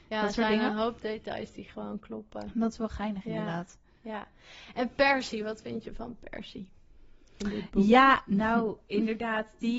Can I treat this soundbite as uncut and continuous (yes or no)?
yes